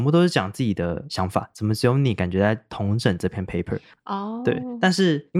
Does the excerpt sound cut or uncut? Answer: uncut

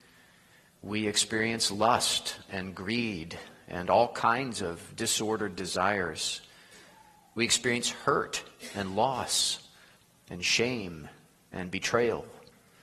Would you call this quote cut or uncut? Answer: uncut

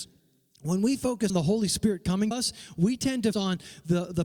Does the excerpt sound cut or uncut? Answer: cut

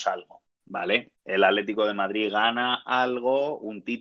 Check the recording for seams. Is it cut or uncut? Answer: cut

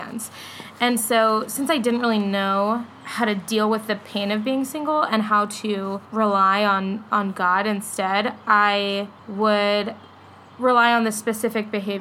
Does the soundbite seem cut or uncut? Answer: cut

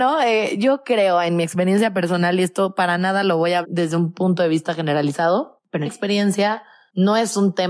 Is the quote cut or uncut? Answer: cut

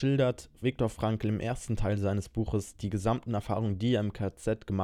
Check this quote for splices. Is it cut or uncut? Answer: uncut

